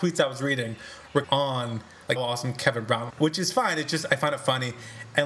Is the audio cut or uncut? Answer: cut